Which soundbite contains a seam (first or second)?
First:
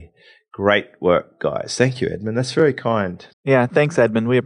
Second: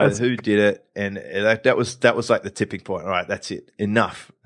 first